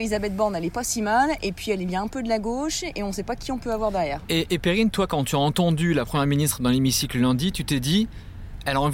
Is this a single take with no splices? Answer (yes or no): yes